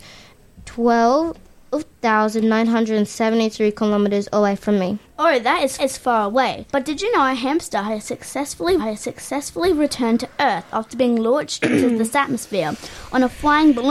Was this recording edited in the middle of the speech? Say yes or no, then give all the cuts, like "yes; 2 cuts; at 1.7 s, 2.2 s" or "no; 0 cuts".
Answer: yes; 4 cuts; at 5.0 s, 5.8 s, 6.7 s, 8.8 s